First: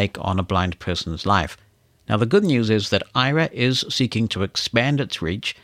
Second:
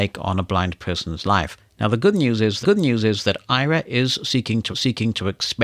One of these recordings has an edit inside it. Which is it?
second; 3 cuts; at 1.7 s, 2.6 s, 4.7 s

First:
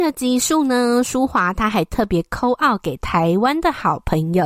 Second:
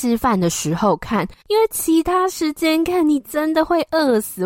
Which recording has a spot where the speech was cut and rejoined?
second; 1 cut; at 1.4 s

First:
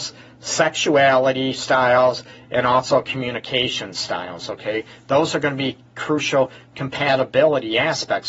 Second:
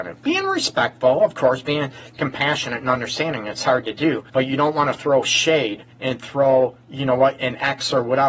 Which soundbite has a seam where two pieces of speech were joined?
second; 3 cuts; at 4.3 s, 5.9 s, 6.8 s

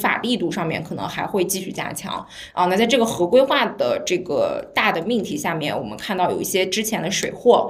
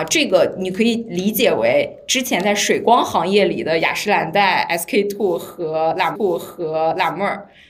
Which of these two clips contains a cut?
second; 1 cut; at 6.2 s

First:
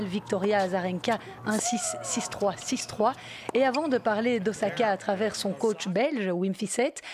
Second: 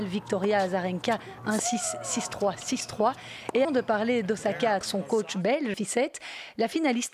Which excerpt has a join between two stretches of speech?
second; 3 cuts; at 3.6 s, 4.8 s, 5.7 s

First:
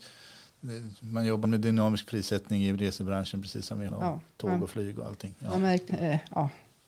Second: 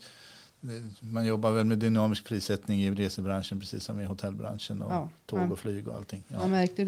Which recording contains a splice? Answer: first; 3 cuts; at 1.4 s, 3.9 s, 5.9 s

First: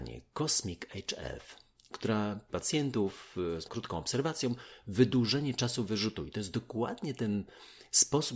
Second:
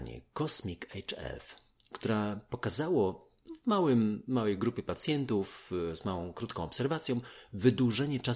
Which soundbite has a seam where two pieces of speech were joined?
first; 2 cuts; at 2.5 s, 3.7 s

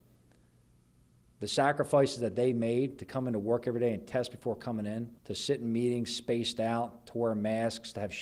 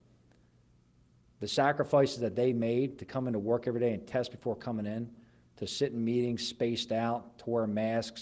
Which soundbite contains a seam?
first; 1 cut; at 5.2 s

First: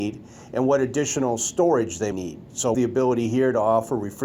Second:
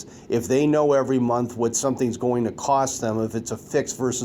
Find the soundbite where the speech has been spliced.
first; 2 cuts; at 2.1 s, 2.7 s

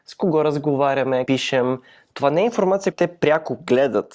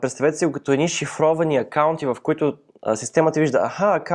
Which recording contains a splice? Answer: first; 2 cuts; at 1.3 s, 2.9 s

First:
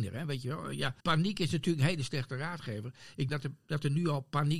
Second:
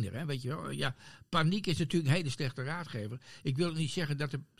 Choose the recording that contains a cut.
first; 2 cuts; at 1.0 s, 3.3 s

